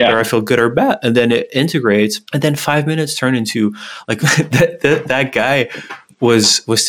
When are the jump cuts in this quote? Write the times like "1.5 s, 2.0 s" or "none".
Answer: 2.3 s